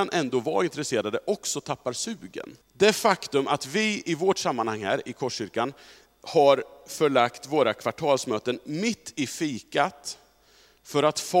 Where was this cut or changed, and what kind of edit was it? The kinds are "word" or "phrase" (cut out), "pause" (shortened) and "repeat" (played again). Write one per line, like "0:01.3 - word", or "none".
0:02.6 - pause